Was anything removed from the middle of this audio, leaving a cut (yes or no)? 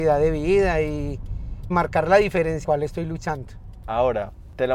yes